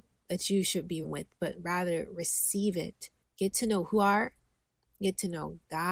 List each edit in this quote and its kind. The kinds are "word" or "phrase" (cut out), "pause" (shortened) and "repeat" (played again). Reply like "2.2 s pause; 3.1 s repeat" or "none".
1.0 s word; 3.2 s pause; 3.9 s word